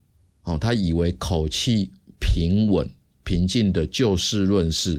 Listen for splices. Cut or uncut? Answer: uncut